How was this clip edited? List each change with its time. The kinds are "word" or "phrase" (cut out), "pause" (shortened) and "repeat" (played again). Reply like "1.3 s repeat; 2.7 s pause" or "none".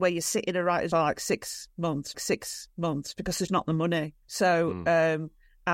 0.9 s phrase; 2.1 s repeat; 3.5 s word; 4.2 s pause